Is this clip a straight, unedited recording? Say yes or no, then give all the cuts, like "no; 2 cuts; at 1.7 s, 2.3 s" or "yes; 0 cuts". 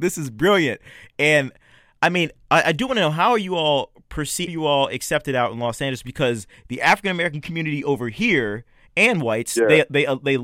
no; 1 cut; at 4.5 s